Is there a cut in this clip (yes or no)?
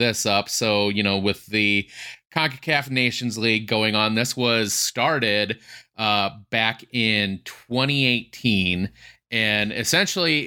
no